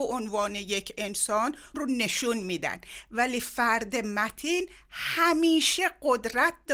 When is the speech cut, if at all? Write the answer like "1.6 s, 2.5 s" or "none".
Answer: 1.7 s